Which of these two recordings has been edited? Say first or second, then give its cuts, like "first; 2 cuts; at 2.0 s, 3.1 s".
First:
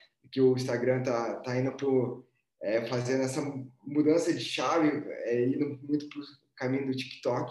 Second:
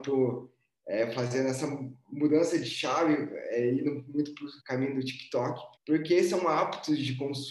second; 2 cuts; at 4.6 s, 5.8 s